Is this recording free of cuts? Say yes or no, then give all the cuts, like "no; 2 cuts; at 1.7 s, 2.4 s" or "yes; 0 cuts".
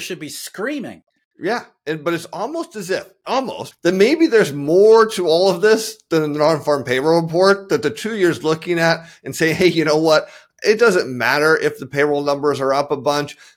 yes; 0 cuts